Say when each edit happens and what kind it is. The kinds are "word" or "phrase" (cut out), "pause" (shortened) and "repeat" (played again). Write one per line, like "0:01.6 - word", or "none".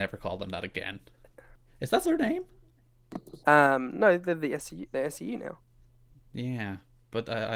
0:02.0 - word

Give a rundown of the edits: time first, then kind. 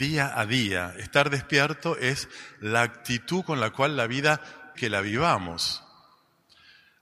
0:04.8 - word

